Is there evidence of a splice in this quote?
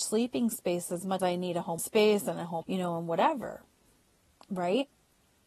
yes; 3 cuts; at 1.2 s, 1.8 s, 2.6 s

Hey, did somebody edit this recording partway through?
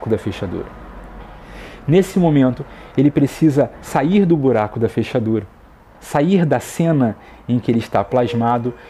no; 0 cuts

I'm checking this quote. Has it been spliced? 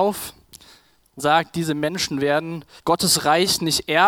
yes; 2 cuts; at 1.2 s, 2.8 s

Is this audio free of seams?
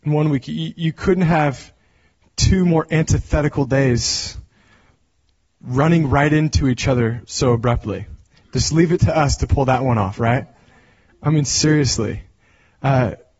yes; 0 cuts

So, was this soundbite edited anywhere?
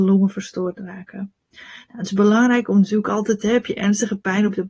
no; 0 cuts

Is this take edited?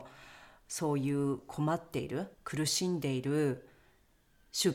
yes; 1 cut; at 2.3 s

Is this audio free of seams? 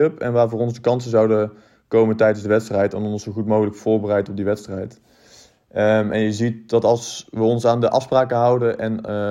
yes; 0 cuts

